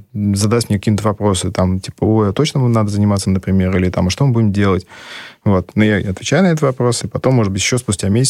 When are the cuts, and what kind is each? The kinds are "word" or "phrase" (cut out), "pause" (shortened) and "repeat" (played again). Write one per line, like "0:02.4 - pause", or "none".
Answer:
0:03.2 - word
0:07.0 - word